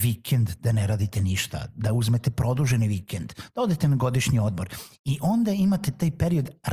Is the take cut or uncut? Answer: uncut